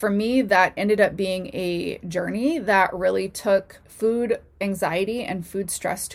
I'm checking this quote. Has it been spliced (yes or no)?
yes